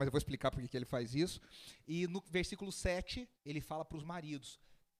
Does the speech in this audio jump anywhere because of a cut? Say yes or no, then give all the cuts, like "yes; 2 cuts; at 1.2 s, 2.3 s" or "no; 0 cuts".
yes; 1 cut; at 3.4 s